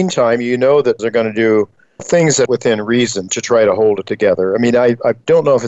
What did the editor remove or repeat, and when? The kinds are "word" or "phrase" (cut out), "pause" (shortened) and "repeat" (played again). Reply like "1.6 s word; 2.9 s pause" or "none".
1.0 s word; 2.0 s word; 2.5 s word